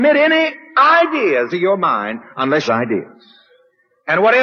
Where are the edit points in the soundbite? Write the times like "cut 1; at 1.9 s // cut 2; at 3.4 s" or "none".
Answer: cut 1; at 1.5 s // cut 2; at 2.7 s